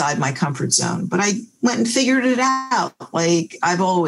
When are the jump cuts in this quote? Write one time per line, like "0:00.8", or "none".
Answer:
none